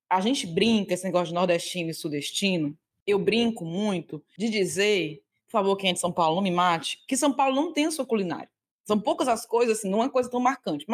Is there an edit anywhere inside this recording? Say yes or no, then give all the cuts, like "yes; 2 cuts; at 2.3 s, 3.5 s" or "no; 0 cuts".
no; 0 cuts